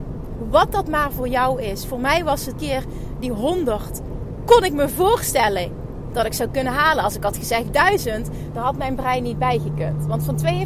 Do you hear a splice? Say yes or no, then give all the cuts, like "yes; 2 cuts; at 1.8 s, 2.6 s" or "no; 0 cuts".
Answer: yes; 1 cut; at 2.5 s